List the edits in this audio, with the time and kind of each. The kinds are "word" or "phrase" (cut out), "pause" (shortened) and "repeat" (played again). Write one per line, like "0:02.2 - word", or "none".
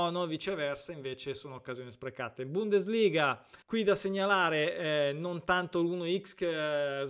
0:03.6 - pause